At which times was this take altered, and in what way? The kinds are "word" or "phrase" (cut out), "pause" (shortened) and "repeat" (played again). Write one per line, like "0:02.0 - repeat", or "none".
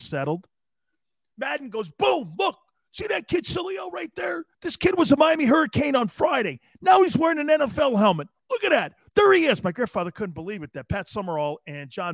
0:04.5 - pause